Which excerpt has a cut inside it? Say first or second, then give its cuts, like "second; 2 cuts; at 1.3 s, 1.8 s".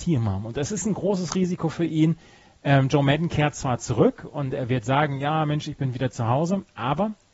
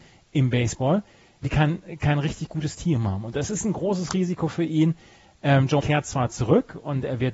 second; 2 cuts; at 1.4 s, 5.8 s